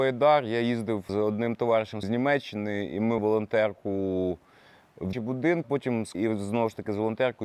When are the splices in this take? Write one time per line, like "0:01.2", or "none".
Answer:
0:01.1
0:02.0
0:03.2
0:05.1
0:05.6
0:06.1